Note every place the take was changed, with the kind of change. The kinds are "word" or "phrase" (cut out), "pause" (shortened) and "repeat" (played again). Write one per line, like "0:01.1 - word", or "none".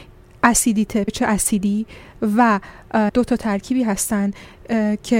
0:01.1 - word
0:03.1 - word